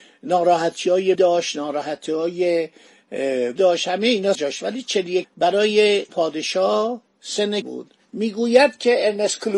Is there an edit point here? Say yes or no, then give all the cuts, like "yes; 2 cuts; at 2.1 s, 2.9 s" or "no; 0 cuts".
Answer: yes; 6 cuts; at 1.1 s, 3.6 s, 4.3 s, 5.2 s, 6.1 s, 7.6 s